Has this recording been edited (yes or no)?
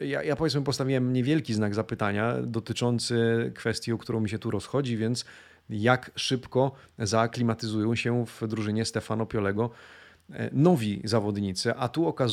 no